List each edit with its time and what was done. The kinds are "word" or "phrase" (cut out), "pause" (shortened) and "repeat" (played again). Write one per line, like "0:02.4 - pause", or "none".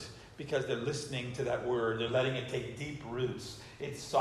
none